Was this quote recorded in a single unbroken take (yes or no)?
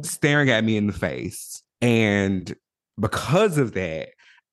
no